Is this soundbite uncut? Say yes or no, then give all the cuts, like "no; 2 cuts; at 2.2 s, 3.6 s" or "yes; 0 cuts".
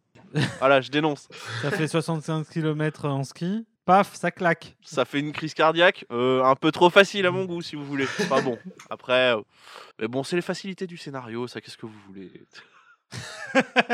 no; 2 cuts; at 3.8 s, 9.9 s